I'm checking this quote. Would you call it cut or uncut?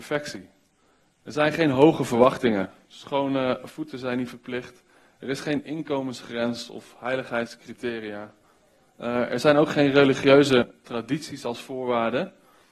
uncut